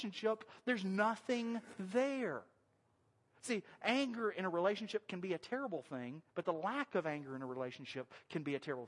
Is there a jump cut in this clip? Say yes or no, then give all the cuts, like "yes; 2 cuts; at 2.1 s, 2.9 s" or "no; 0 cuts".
yes; 1 cut; at 6.3 s